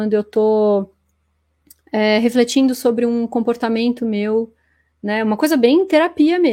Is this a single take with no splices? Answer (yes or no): yes